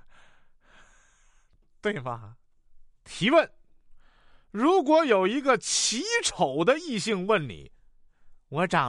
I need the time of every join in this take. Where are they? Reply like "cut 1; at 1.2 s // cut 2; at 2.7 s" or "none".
cut 1; at 2.9 s